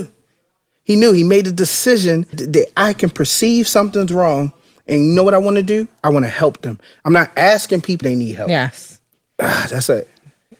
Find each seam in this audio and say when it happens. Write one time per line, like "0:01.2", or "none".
0:02.3
0:08.0